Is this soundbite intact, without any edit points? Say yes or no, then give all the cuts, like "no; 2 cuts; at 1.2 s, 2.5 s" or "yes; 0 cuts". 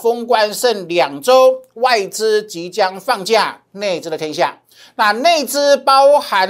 yes; 0 cuts